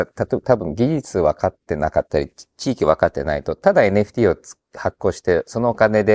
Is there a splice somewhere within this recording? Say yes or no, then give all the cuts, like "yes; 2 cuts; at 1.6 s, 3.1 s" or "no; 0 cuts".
yes; 1 cut; at 4.6 s